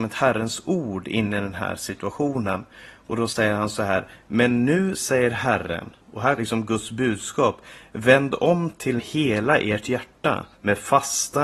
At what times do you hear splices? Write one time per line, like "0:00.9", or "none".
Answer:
0:06.0
0:06.4
0:09.0
0:10.5